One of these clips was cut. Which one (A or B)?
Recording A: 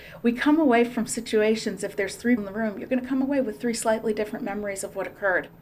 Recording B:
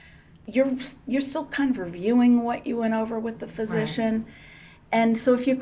A